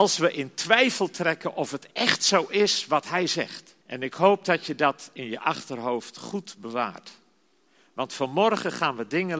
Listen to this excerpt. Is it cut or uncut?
cut